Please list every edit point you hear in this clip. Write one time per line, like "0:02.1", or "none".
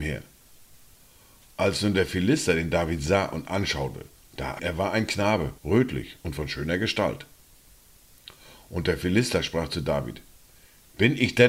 0:04.6
0:05.6